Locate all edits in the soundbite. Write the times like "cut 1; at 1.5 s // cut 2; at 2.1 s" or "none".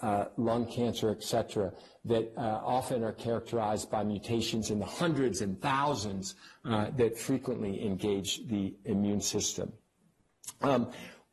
none